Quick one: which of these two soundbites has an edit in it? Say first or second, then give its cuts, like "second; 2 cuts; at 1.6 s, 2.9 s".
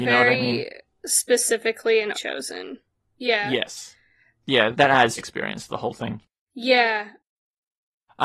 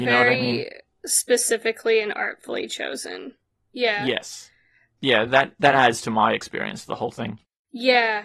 first; 3 cuts; at 2.1 s, 4.7 s, 5.2 s